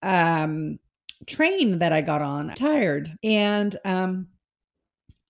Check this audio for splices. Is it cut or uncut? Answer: cut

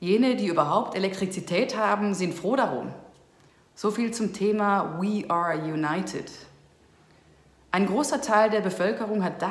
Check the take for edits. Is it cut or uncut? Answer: uncut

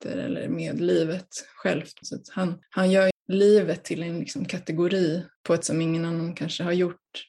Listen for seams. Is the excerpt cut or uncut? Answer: cut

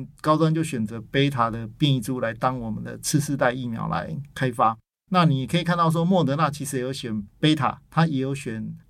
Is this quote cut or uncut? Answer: uncut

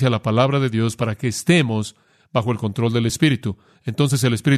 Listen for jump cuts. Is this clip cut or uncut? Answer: uncut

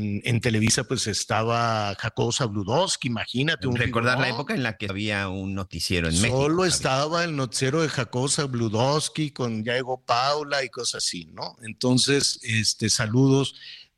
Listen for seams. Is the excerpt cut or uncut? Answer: cut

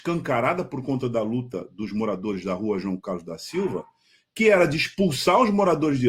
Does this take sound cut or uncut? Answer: uncut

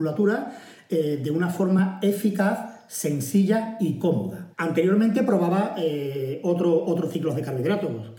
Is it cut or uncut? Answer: cut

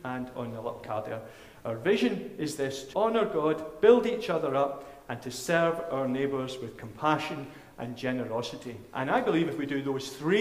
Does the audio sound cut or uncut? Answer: cut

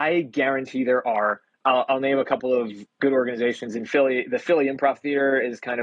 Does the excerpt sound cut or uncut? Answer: uncut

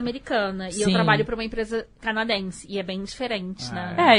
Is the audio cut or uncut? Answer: uncut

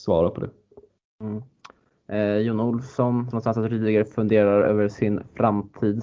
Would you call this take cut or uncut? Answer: cut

